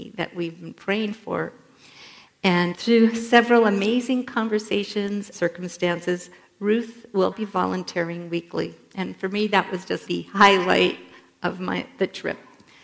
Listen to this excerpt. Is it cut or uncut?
cut